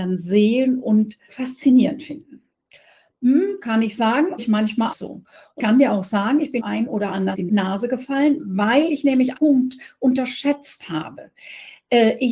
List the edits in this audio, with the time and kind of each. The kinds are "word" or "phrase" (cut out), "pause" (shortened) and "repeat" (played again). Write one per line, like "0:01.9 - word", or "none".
0:01.3 - word
0:04.4 - word
0:04.9 - word
0:05.6 - word
0:06.6 - word
0:07.3 - word
0:09.3 - word